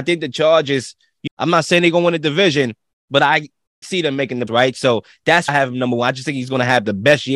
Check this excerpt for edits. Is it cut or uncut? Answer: cut